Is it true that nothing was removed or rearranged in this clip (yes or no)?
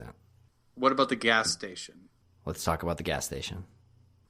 yes